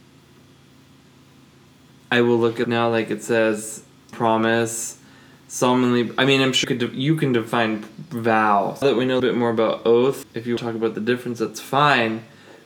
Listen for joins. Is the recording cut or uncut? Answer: cut